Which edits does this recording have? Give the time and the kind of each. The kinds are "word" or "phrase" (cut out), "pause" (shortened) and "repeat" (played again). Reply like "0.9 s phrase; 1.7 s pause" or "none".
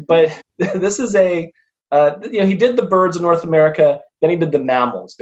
none